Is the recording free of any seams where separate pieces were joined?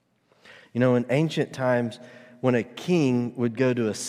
yes; 0 cuts

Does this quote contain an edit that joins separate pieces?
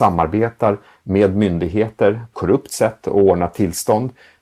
yes; 1 cut; at 2.3 s

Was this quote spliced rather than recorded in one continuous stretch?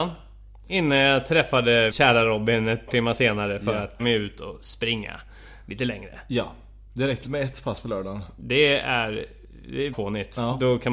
yes; 5 cuts; at 1.9 s, 2.9 s, 4.0 s, 7.2 s, 9.9 s

